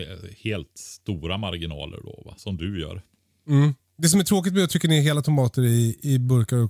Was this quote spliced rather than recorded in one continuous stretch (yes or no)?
no